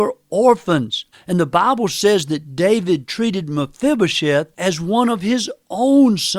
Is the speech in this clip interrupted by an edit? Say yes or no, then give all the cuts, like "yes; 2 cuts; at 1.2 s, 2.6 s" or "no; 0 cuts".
yes; 2 cuts; at 1.1 s, 4.5 s